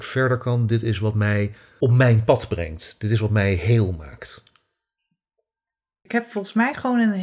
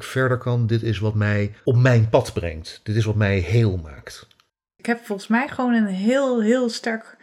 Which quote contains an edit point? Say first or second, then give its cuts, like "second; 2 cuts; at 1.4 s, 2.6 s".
second; 2 cuts; at 1.6 s, 4.5 s